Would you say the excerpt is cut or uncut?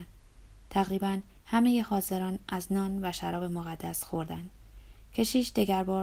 uncut